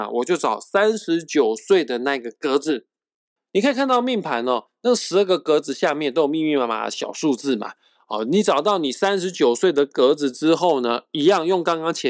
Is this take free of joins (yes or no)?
yes